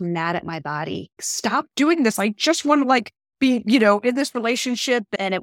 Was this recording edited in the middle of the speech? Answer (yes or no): yes